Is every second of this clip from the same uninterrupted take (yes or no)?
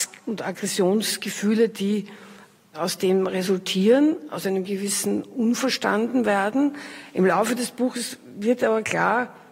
yes